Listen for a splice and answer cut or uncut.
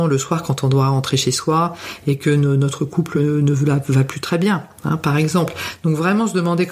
uncut